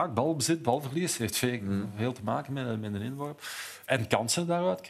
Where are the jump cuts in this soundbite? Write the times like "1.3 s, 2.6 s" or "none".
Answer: none

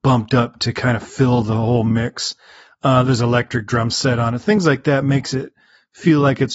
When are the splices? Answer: none

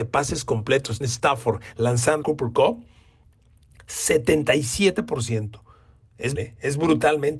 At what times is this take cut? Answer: 1.0 s, 2.2 s, 6.4 s

